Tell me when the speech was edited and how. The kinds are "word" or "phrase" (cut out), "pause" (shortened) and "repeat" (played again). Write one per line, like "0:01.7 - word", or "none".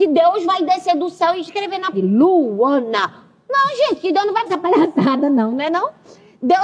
0:01.9 - word
0:04.5 - word